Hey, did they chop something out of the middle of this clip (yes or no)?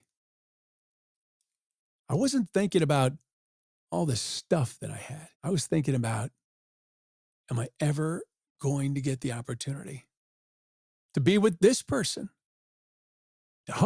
yes